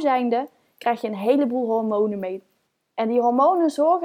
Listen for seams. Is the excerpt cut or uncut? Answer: uncut